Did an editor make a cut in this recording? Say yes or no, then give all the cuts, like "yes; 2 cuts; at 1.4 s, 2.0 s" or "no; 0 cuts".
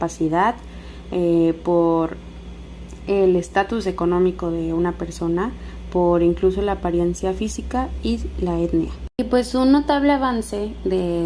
no; 0 cuts